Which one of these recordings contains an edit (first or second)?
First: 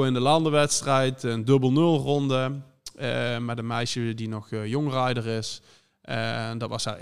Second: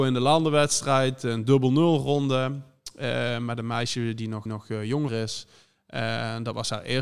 second